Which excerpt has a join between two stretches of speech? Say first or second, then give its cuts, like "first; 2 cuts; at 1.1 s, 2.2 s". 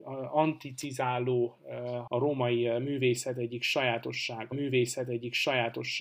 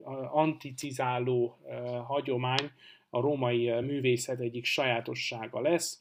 first; 2 cuts; at 2.1 s, 4.5 s